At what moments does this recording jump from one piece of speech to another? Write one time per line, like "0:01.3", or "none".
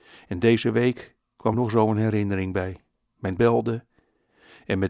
0:01.5
0:03.4